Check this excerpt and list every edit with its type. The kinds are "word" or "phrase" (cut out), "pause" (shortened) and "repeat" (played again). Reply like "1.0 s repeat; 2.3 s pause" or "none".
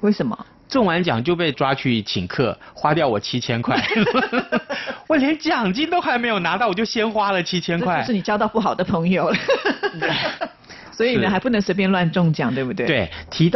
1.5 s word